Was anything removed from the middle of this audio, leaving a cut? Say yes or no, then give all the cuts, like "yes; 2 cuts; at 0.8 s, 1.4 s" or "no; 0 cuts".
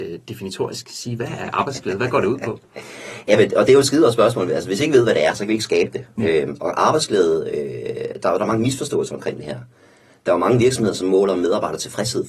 no; 0 cuts